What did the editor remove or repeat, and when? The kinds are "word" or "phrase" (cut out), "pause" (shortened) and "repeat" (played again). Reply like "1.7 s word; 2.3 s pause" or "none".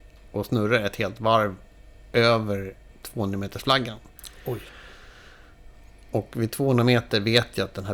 2.9 s pause

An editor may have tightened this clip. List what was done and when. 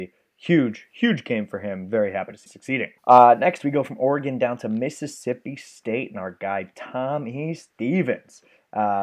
2.5 s word; 3.0 s pause

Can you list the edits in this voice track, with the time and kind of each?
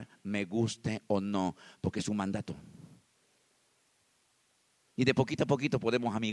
none

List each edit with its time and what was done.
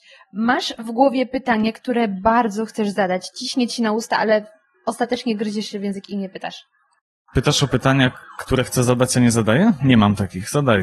none

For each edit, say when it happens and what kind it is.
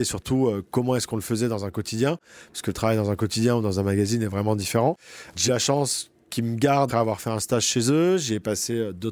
5.5 s word; 6.9 s word

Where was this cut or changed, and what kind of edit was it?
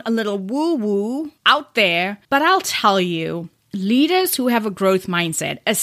1.4 s pause; 2.2 s pause

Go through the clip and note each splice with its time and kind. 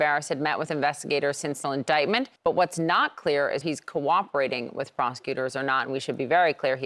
1.6 s word; 2.4 s pause; 3.6 s word

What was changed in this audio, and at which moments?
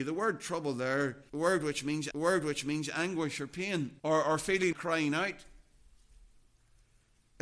1.3 s word; 2.1 s repeat; 4.0 s pause; 4.7 s word

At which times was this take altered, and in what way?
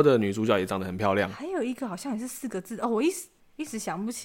none

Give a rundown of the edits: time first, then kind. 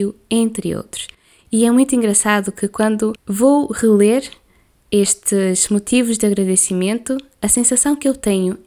none

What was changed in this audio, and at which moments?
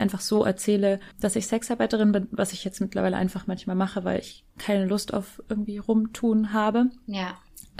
1.1 s pause; 4.5 s pause

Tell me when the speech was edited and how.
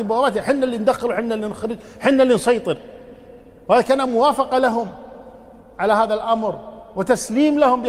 none

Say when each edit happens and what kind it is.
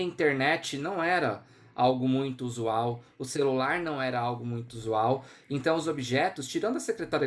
none

